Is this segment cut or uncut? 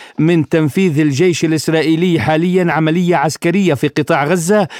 uncut